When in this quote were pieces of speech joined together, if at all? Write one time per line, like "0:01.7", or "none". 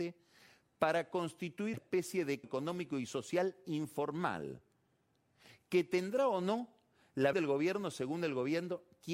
0:01.7
0:02.4
0:07.3